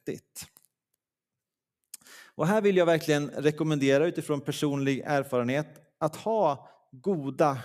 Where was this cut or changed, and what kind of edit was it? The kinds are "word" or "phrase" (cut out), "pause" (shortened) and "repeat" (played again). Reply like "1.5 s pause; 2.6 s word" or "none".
none